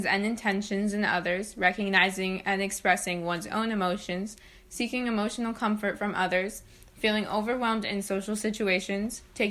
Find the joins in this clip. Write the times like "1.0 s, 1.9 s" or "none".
none